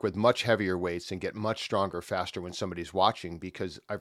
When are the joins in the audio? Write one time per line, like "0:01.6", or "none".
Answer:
none